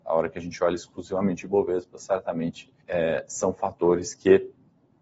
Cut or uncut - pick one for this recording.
cut